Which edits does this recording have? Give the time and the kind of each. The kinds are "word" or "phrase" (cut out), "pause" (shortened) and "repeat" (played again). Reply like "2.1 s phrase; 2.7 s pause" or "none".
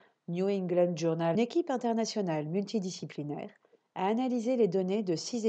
1.3 s phrase